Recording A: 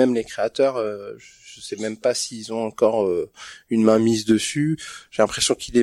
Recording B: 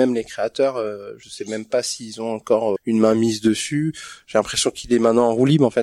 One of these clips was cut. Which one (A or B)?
B